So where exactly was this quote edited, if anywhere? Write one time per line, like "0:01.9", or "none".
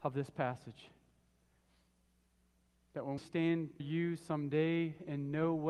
0:03.2
0:03.8